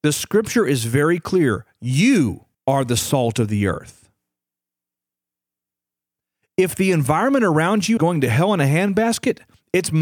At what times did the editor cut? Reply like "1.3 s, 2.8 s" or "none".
2.5 s, 8.0 s